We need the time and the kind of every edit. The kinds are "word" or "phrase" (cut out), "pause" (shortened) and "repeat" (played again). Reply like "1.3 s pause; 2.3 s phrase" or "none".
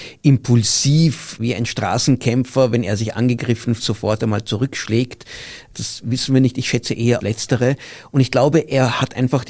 3.8 s word; 7.2 s word